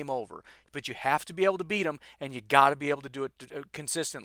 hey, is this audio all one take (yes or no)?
yes